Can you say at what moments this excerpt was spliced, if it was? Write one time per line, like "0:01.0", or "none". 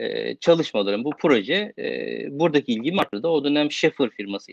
none